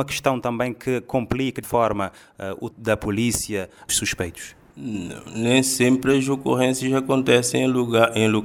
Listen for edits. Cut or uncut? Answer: cut